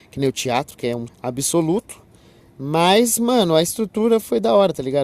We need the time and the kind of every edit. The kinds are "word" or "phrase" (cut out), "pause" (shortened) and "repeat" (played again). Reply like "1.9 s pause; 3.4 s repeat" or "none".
1.1 s word